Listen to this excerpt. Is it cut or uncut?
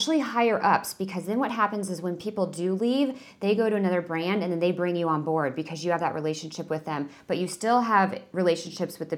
uncut